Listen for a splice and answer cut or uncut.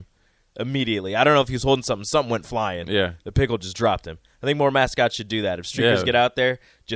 uncut